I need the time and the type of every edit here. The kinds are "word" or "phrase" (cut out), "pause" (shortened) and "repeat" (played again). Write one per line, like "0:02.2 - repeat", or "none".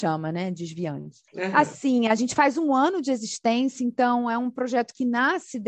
0:01.3 - pause